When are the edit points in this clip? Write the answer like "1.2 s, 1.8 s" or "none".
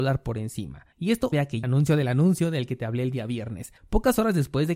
0.9 s, 1.3 s, 1.6 s, 3.8 s